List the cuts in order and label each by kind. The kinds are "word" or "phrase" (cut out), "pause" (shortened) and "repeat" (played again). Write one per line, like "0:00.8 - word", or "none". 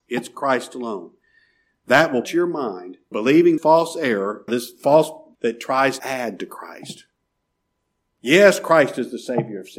0:02.2 - word
0:03.1 - word
0:03.6 - word
0:04.5 - word
0:05.3 - word
0:06.0 - word